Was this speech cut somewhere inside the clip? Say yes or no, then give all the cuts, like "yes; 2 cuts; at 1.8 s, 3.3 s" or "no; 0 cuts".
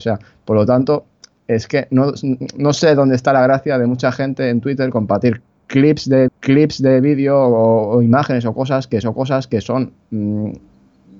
yes; 2 cuts; at 6.3 s, 9.0 s